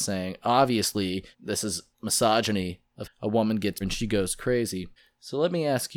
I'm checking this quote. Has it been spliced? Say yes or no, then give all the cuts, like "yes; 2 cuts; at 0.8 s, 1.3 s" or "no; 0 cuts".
yes; 5 cuts; at 1.3 s, 1.9 s, 3.0 s, 3.8 s, 5.0 s